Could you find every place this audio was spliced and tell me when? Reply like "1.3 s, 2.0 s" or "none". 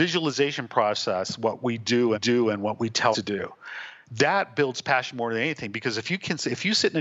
2.1 s, 3.1 s, 4.0 s